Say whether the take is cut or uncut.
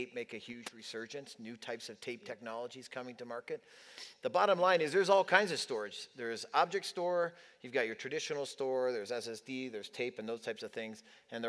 uncut